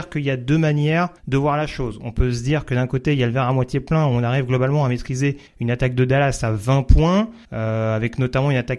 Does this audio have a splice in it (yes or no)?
yes